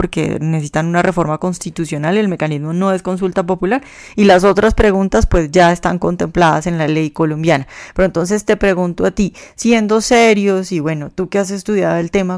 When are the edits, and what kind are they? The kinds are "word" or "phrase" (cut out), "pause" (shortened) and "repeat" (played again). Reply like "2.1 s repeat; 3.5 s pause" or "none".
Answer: none